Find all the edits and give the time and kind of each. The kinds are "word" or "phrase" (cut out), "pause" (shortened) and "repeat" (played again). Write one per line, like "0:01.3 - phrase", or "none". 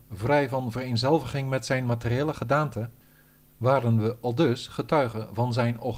none